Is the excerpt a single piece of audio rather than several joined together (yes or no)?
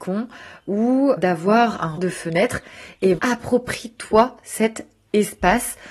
no